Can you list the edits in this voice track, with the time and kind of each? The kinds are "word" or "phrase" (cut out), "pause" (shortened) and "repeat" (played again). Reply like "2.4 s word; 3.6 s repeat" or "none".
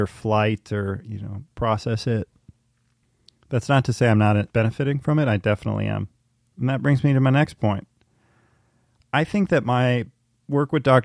1.5 s pause; 3.0 s pause; 4.5 s pause